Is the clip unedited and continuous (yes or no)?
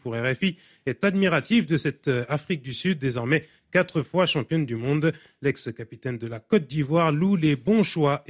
yes